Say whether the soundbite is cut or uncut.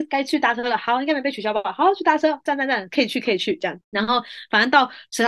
uncut